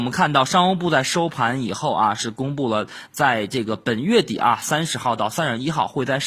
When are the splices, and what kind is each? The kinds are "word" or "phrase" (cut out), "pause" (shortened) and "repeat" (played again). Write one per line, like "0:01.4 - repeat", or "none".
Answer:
none